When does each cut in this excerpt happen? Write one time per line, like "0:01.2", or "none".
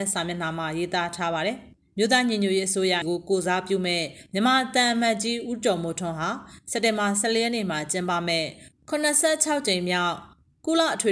0:03.0